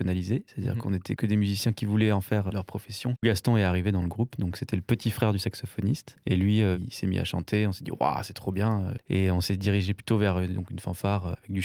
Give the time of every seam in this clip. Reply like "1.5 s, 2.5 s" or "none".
none